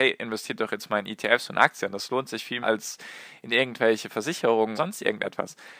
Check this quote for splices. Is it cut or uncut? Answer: cut